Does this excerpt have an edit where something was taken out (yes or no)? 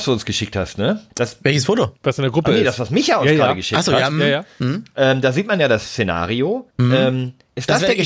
yes